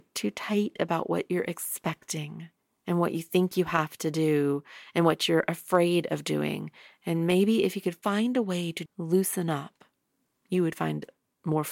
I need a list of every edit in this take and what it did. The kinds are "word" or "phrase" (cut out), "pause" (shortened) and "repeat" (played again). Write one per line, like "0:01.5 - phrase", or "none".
0:08.9 - word